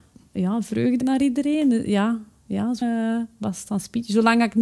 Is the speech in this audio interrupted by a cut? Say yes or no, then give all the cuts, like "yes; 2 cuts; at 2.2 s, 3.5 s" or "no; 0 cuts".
yes; 2 cuts; at 1.0 s, 2.8 s